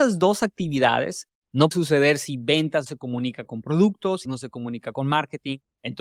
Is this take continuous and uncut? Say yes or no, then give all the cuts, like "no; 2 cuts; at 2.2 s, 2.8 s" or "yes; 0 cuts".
no; 3 cuts; at 1.7 s, 2.9 s, 4.2 s